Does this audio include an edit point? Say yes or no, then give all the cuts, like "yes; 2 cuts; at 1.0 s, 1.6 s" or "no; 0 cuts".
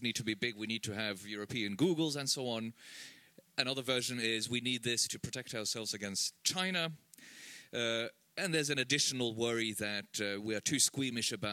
no; 0 cuts